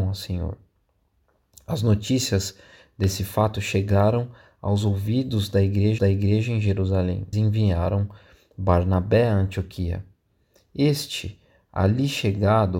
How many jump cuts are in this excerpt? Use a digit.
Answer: 2